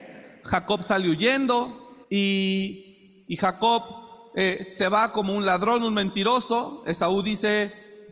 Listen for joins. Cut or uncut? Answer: cut